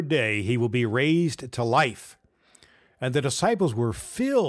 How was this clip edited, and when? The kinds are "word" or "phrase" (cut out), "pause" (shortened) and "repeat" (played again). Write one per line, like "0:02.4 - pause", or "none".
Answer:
none